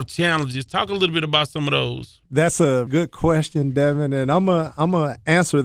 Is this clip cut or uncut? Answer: cut